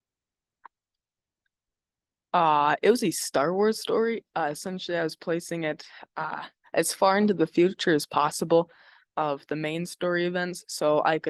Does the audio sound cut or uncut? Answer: uncut